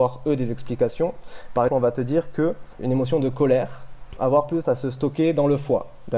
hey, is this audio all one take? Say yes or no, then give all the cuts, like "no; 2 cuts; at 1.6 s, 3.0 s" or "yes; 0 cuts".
no; 4 cuts; at 1.7 s, 2.8 s, 4.2 s, 4.6 s